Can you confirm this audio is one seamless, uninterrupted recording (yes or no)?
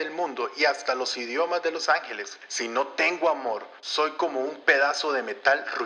yes